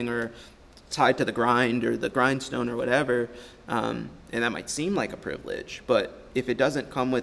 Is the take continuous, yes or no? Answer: yes